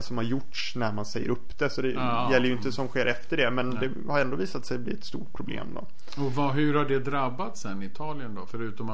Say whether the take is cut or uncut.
uncut